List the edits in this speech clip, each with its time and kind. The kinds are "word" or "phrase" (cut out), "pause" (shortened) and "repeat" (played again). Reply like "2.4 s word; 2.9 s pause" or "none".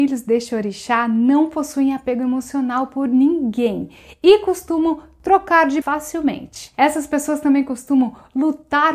5.8 s word